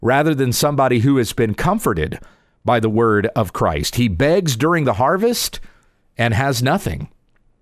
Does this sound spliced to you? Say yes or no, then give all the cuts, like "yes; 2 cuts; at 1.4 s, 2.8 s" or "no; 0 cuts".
no; 0 cuts